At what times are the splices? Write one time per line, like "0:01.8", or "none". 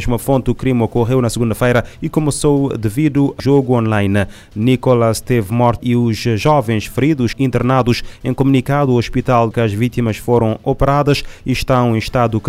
0:03.4
0:05.8
0:07.3
0:09.5